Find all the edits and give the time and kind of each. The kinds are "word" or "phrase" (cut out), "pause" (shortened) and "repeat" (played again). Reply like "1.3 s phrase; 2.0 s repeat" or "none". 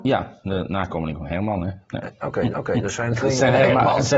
2.5 s repeat; 3.2 s word